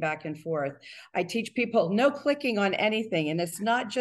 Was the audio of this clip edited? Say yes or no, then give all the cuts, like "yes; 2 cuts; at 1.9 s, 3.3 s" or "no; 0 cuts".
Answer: no; 0 cuts